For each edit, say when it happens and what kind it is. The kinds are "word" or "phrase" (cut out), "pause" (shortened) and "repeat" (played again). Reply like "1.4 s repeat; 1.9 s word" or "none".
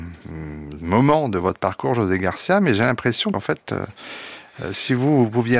3.3 s word